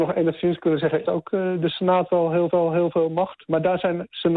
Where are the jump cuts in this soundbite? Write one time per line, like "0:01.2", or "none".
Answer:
0:01.0
0:02.5